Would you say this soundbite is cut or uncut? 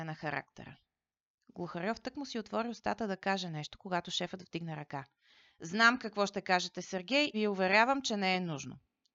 cut